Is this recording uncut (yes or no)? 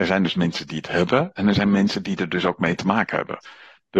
yes